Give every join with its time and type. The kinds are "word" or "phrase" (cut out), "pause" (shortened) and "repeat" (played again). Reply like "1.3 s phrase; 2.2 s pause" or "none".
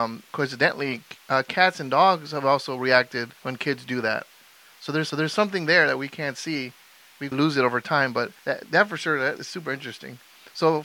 3.4 s pause; 5.1 s repeat; 7.3 s word; 8.4 s pause; 9.4 s word

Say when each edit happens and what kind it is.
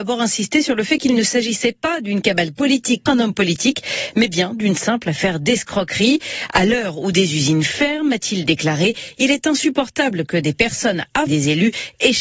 3.1 s word; 11.3 s word

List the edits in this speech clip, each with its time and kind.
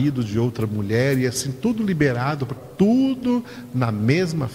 2.6 s word

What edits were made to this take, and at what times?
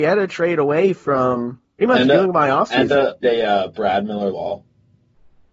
1.8 s word; 3.2 s word; 4.3 s word

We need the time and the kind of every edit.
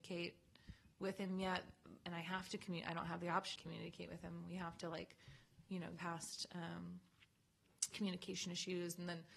3.6 s phrase; 6.0 s word; 7.9 s word

